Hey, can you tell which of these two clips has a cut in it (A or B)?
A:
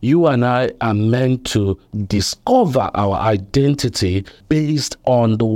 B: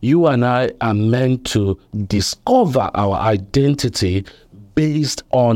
A